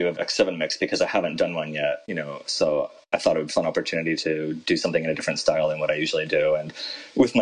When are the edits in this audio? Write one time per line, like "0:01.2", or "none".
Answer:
0:03.5